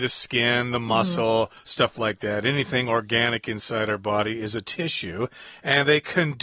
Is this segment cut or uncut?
uncut